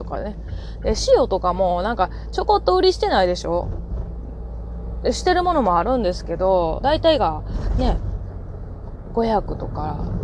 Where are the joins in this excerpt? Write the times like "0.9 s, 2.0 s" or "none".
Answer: 6.8 s